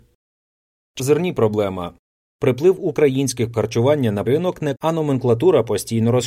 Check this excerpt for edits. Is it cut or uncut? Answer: cut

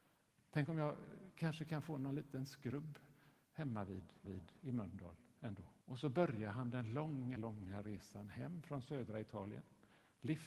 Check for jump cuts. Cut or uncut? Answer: cut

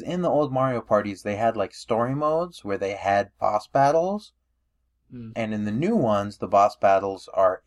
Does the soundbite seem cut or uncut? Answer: uncut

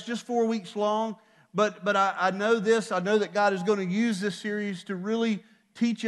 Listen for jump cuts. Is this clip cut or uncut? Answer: uncut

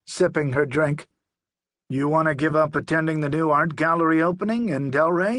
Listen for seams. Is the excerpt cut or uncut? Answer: uncut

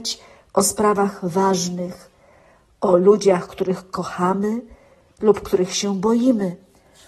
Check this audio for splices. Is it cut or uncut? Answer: uncut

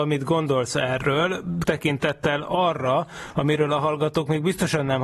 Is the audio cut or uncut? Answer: cut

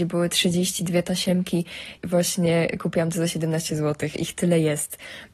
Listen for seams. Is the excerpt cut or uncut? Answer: cut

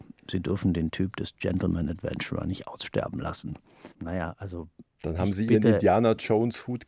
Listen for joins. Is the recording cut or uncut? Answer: cut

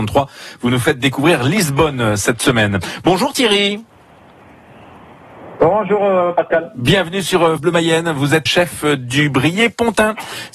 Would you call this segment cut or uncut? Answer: cut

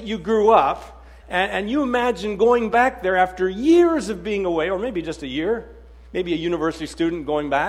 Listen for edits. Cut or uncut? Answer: uncut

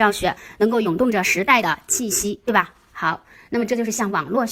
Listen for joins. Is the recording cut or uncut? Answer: uncut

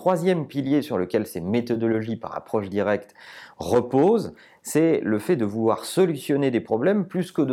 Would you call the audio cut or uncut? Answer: uncut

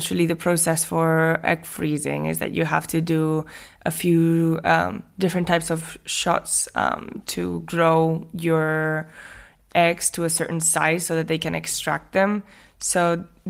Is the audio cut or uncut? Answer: uncut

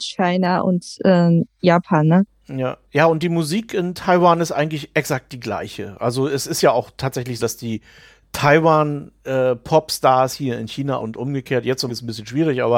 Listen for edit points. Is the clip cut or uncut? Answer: cut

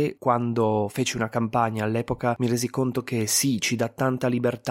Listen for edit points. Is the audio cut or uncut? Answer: uncut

